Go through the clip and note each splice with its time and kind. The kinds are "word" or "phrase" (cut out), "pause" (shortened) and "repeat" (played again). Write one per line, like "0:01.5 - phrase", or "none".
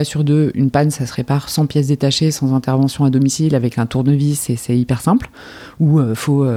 none